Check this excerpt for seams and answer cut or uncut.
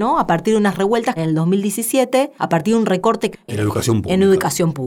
cut